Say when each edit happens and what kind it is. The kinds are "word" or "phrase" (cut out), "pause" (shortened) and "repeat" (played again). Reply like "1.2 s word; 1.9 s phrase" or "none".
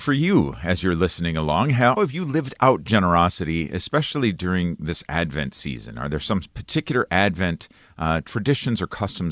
2.0 s word